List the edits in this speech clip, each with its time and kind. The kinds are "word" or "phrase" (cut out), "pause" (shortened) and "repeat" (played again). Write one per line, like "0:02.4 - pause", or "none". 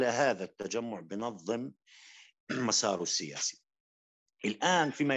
0:02.4 - word